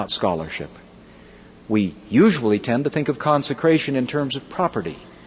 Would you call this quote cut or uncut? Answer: uncut